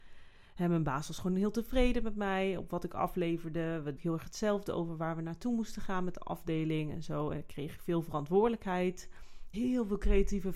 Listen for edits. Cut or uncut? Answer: cut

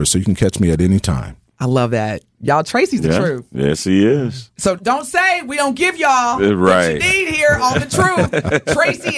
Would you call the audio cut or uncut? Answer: cut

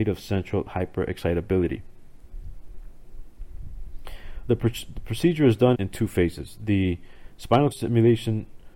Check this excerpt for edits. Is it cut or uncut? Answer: cut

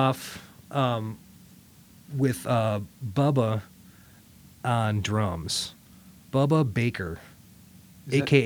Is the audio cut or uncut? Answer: uncut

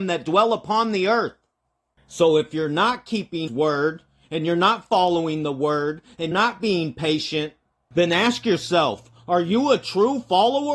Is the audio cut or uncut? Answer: cut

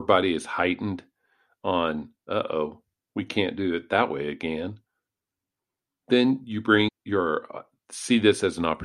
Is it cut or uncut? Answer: cut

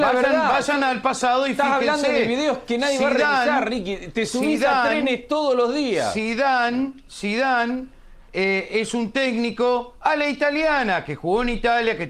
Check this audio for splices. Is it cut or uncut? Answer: uncut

